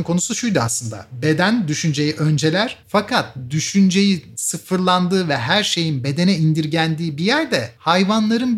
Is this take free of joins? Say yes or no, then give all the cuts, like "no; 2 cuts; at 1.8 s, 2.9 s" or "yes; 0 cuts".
no; 1 cut; at 2.8 s